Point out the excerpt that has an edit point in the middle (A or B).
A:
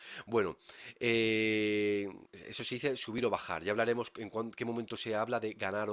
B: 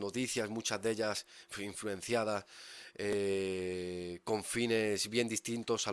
A